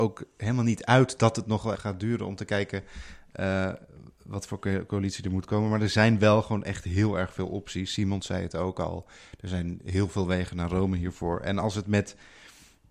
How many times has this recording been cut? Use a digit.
1